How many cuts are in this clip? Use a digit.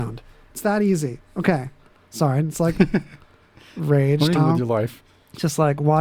2